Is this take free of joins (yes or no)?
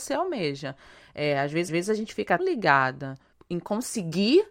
no